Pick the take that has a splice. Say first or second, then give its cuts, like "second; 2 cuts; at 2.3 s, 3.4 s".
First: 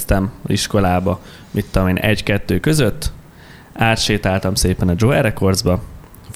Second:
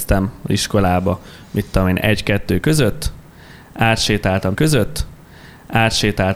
second; 1 cut; at 4.5 s